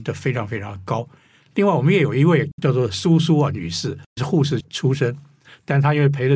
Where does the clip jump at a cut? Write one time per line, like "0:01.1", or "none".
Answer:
none